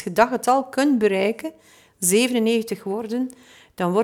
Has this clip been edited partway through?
no; 0 cuts

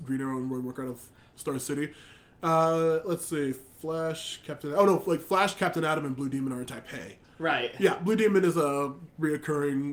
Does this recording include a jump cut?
no; 0 cuts

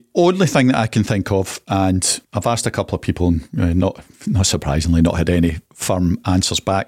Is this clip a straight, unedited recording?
no; 1 cut; at 2.2 s

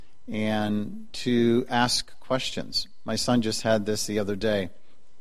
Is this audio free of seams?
yes; 0 cuts

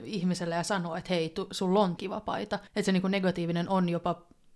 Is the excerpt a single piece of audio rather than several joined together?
no; 2 cuts; at 2.0 s, 2.7 s

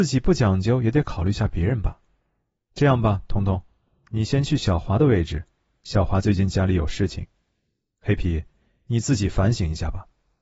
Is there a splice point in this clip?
no; 0 cuts

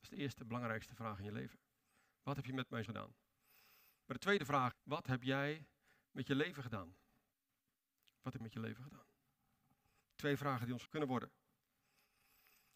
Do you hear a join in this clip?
yes; 4 cuts; at 2.9 s, 4.7 s, 8.4 s, 10.9 s

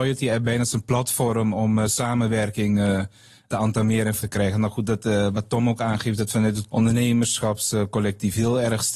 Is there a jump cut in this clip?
yes; 1 cut; at 4.2 s

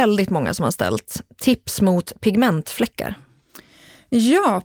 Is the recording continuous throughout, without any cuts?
yes; 0 cuts

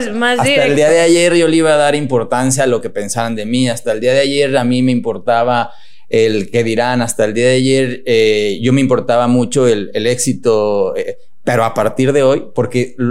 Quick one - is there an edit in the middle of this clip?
no; 0 cuts

